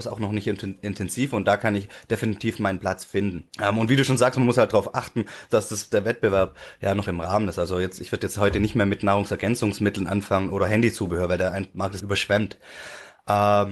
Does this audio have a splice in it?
yes; 3 cuts; at 3.5 s, 5.5 s, 12.0 s

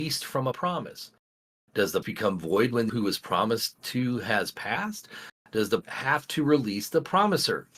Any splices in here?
yes; 3 cuts; at 2.0 s, 2.9 s, 5.8 s

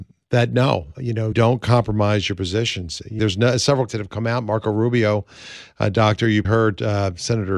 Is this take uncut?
no; 5 cuts; at 0.9 s, 1.3 s, 3.2 s, 3.9 s, 6.4 s

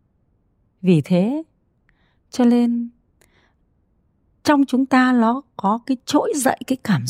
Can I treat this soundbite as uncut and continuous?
yes; 0 cuts

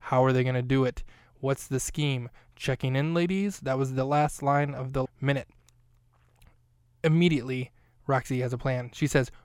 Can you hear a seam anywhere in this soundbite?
yes; 1 cut; at 5.1 s

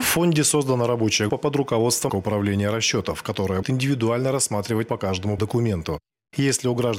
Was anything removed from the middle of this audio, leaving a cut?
yes; 5 cuts; at 1.3 s, 2.1 s, 3.6 s, 4.9 s, 5.4 s

